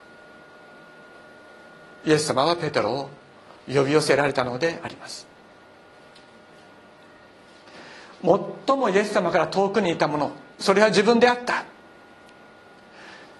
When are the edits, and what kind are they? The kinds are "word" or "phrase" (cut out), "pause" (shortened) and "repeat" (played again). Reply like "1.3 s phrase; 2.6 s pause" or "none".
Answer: 10.5 s pause